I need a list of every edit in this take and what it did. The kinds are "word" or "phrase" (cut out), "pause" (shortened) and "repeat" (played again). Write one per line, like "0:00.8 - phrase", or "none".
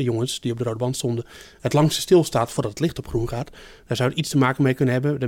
none